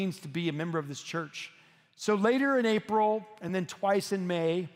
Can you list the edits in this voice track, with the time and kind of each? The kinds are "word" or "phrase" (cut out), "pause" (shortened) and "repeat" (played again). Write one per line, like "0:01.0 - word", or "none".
none